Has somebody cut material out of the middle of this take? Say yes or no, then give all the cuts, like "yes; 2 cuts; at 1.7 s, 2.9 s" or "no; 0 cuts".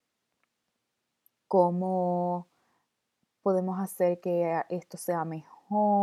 no; 0 cuts